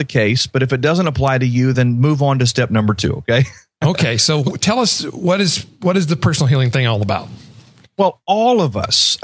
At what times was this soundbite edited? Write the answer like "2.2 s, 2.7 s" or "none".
none